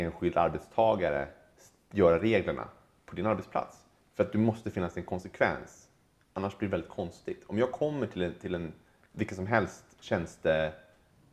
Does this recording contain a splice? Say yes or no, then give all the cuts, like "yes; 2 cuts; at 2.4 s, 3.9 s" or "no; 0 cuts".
no; 0 cuts